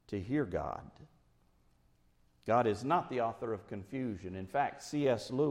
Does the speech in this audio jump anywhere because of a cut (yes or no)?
no